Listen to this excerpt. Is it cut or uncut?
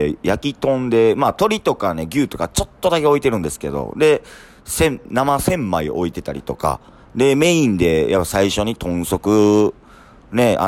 uncut